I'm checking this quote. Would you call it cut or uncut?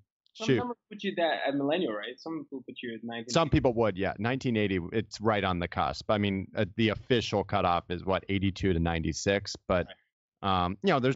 uncut